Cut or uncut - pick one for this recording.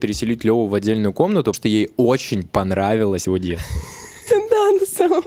cut